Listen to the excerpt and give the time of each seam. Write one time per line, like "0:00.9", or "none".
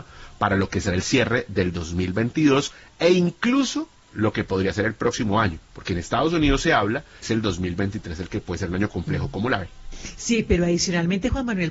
0:05.6
0:07.2